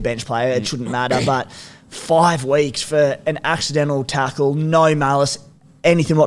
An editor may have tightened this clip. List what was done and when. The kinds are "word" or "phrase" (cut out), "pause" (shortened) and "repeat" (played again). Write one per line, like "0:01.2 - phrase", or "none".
none

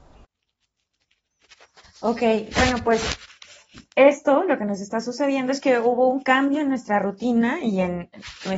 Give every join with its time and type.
none

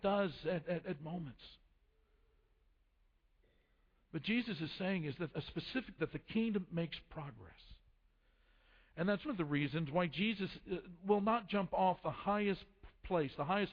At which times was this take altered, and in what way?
0:01.0 - word
0:05.3 - word
0:06.0 - word
0:09.2 - word

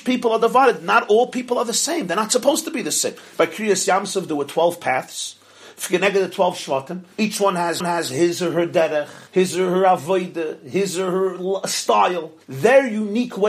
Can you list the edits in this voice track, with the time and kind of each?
0:07.1 - pause
0:07.8 - repeat
0:09.3 - pause
0:12.4 - pause

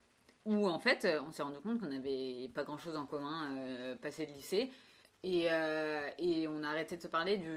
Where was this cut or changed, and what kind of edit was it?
0:05.0 - pause

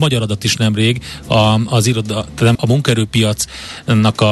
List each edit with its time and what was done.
0:02.5 - phrase

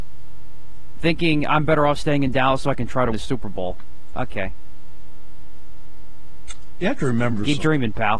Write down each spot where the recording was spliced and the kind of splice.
0:03.1 - word

